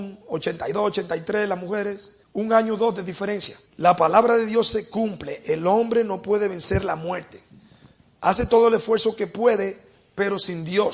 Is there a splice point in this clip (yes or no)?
yes